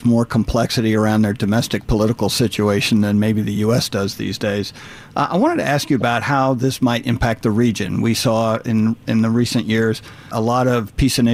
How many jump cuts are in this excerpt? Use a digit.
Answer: 1